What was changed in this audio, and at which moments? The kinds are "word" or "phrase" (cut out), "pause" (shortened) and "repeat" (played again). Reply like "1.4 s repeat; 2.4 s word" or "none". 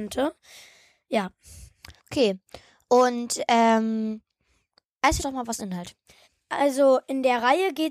2.0 s pause; 5.2 s phrase; 5.6 s word; 6.2 s pause